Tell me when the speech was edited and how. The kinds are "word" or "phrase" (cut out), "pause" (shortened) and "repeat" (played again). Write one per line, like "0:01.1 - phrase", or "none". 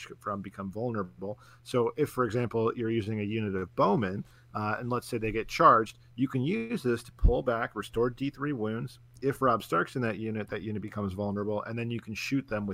none